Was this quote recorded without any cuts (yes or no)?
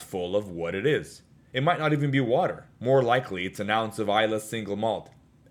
no